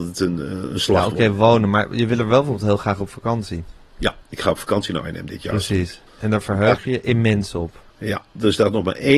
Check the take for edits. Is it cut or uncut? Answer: cut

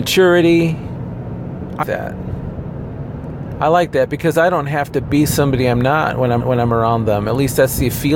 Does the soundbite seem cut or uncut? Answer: cut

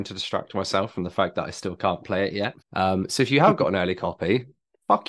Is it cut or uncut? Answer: cut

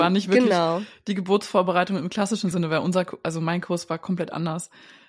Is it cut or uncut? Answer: uncut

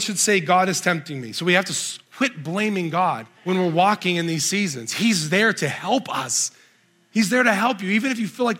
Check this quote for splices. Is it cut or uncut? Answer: cut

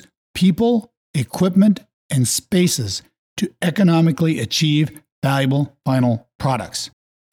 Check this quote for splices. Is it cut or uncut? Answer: uncut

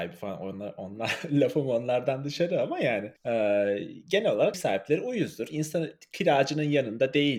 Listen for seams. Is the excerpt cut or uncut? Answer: cut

